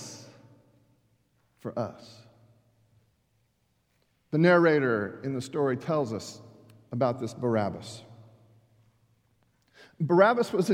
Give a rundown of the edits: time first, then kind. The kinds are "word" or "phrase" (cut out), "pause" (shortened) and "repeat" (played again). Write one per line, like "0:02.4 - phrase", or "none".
none